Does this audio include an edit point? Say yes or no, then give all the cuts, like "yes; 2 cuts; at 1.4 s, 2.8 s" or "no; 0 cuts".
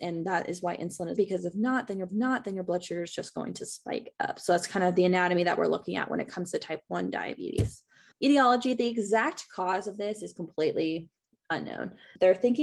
yes; 3 cuts; at 1.2 s, 2.1 s, 8.1 s